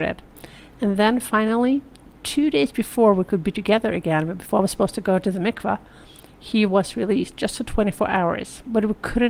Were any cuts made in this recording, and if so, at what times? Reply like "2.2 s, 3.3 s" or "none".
none